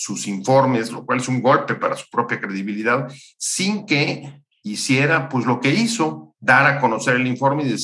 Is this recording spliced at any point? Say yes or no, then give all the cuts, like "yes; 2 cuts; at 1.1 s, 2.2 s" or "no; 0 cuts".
no; 0 cuts